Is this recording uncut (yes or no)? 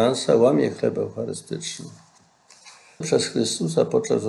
no